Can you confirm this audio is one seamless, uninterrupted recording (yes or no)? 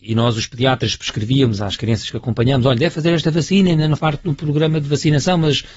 no